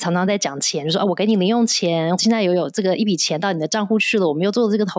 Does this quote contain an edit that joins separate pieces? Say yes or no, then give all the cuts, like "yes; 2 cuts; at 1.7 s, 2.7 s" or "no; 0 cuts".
yes; 1 cut; at 2.2 s